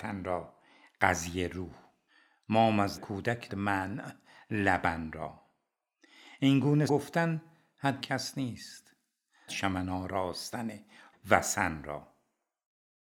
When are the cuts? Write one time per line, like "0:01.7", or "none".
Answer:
0:03.0
0:03.5
0:06.9
0:08.0
0:09.5
0:11.1